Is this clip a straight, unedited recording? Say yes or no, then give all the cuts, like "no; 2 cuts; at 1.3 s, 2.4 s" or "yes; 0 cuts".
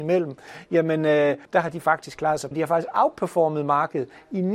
no; 2 cuts; at 1.4 s, 2.5 s